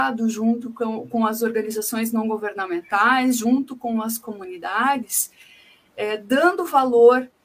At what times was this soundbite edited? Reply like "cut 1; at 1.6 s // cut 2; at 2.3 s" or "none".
none